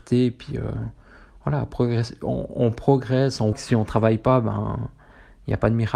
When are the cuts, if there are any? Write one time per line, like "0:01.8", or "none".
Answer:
0:03.5